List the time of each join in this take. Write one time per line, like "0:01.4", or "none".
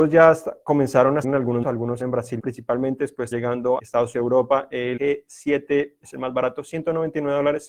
0:01.2
0:01.6
0:02.0
0:02.4
0:03.3
0:03.8
0:04.1
0:05.0
0:06.0